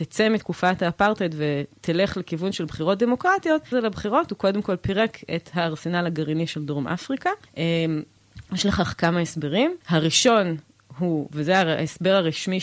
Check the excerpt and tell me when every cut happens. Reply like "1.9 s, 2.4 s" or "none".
3.7 s, 7.4 s, 9.8 s